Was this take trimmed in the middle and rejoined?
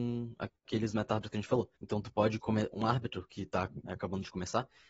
yes; 1 cut; at 1.8 s

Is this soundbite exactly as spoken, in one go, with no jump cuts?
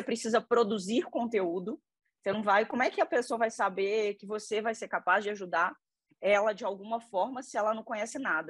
yes; 0 cuts

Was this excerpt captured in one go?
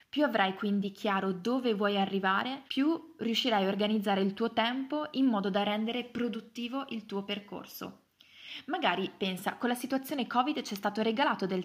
no; 1 cut; at 2.7 s

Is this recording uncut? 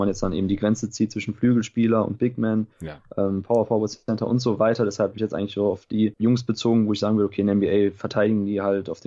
no; 1 cut; at 5.2 s

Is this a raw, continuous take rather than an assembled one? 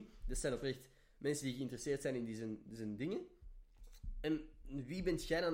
yes; 0 cuts

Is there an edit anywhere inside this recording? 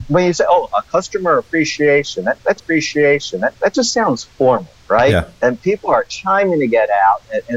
yes; 1 cut; at 2.6 s

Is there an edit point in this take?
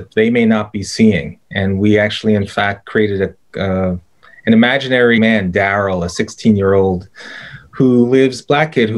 yes; 1 cut; at 5.2 s

